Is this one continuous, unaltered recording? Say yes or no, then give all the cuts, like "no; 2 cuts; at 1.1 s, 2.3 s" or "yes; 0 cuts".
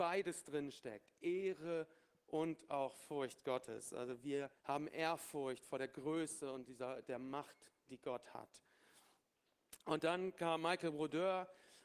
no; 1 cut; at 4.6 s